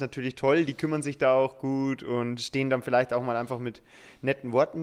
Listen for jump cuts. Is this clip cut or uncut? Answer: uncut